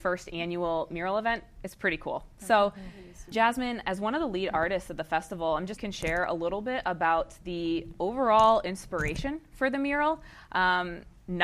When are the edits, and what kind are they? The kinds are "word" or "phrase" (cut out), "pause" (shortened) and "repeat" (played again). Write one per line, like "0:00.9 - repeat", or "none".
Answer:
0:03.3 - word
0:05.8 - phrase